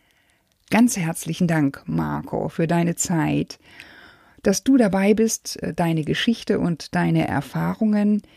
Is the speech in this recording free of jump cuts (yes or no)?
yes